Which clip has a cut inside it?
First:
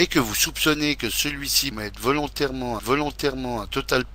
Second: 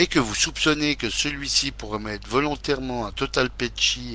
first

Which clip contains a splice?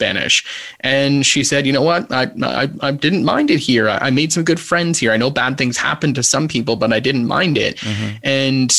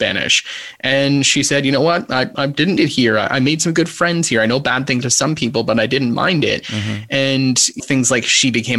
second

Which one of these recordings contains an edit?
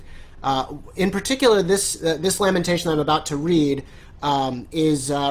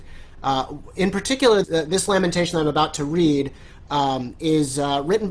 second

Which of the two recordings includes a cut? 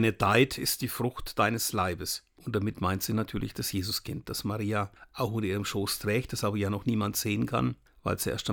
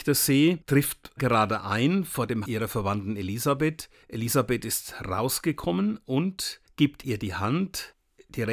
second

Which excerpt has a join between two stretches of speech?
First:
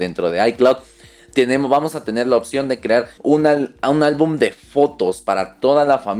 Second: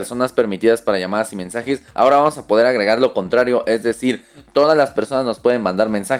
first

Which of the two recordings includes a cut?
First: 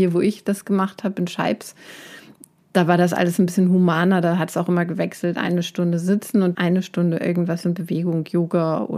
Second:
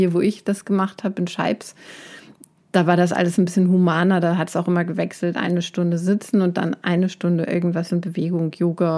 first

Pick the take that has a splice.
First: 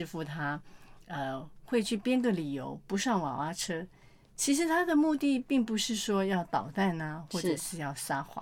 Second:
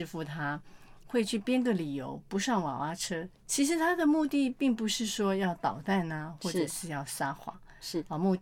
second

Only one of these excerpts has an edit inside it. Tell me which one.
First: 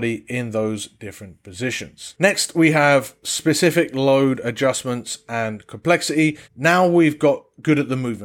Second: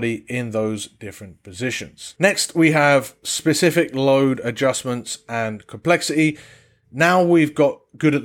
first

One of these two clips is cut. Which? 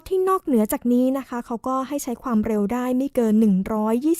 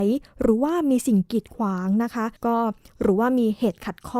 second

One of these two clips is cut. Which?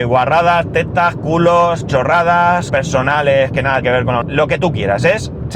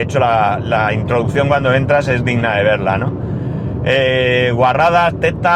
first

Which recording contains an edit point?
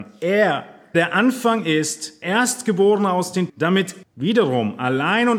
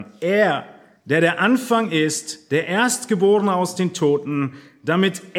first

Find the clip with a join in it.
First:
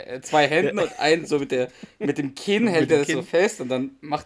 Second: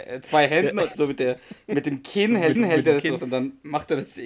second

